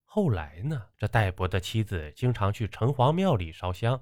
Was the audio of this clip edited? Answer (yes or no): yes